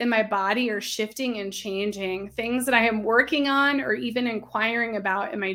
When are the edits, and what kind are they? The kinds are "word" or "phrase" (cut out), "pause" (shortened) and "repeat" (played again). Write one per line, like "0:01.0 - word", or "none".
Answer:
none

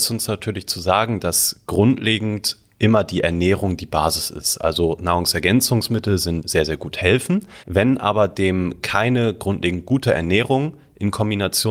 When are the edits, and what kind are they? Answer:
0:06.4 - phrase
0:07.6 - pause

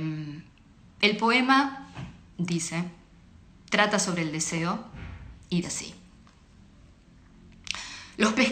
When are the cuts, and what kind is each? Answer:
0:05.6 - word

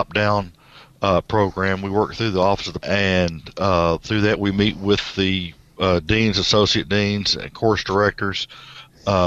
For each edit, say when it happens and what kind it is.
0:02.8 - word

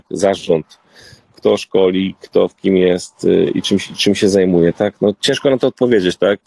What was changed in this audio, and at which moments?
none

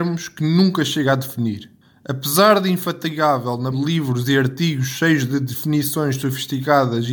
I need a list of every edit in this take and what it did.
0:01.8 - pause
0:03.7 - word

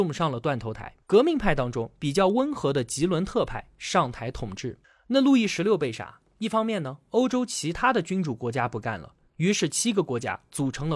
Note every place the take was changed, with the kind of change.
0:01.0 - pause
0:04.8 - pause

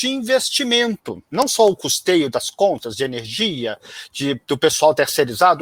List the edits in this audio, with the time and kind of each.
0:01.3 - pause

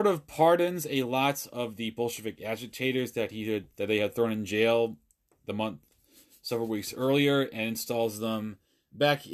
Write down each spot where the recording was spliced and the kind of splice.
none

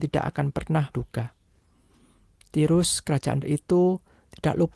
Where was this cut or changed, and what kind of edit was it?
0:00.9 - word
0:03.4 - word

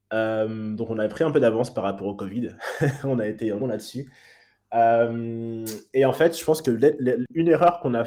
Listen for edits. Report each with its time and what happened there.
0:03.6 - word

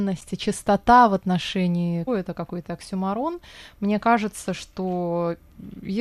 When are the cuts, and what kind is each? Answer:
0:02.1 - word

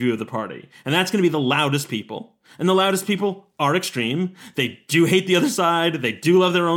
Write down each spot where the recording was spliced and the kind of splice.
none

